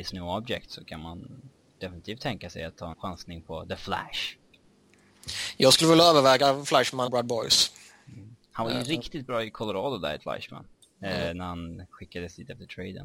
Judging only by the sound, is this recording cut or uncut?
cut